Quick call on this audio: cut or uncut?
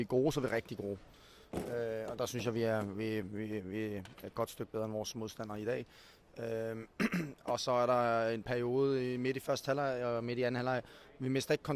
uncut